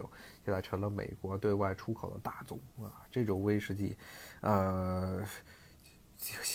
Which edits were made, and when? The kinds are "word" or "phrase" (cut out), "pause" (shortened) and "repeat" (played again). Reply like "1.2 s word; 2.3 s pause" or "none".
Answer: none

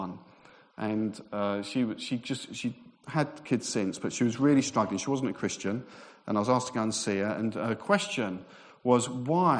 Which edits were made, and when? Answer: none

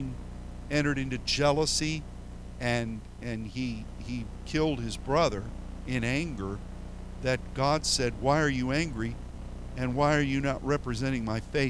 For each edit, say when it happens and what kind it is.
none

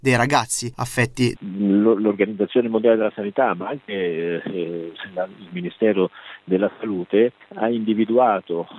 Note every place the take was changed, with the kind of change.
1.3 s phrase; 5.5 s word

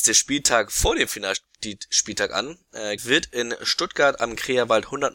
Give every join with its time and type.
3.0 s word

